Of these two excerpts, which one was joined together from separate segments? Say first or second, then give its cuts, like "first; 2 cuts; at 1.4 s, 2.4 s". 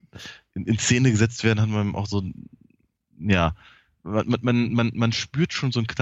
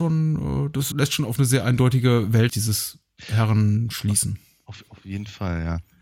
second; 3 cuts; at 0.9 s, 2.5 s, 4.9 s